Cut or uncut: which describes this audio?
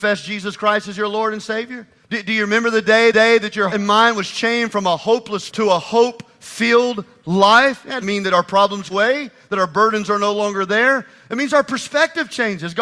cut